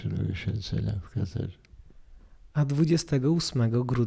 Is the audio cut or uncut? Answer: uncut